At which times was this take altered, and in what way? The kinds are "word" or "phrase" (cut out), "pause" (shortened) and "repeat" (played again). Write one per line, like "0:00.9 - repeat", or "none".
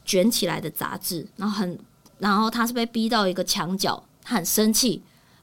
0:01.3 - word